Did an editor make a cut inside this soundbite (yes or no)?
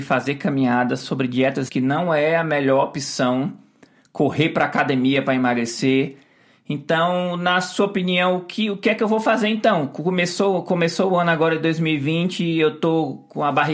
yes